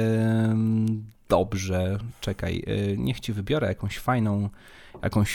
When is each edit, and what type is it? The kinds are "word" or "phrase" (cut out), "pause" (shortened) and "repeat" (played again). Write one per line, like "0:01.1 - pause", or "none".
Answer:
none